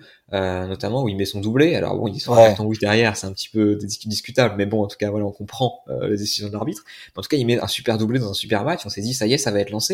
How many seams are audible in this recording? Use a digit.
0